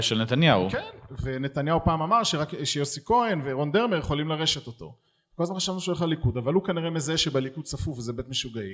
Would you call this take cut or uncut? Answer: uncut